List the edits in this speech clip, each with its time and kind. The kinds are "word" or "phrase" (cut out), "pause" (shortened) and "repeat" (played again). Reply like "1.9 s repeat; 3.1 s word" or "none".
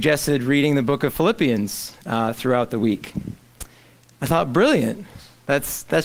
none